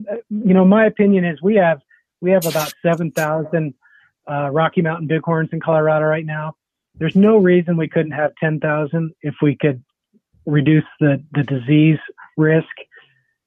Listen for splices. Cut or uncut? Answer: uncut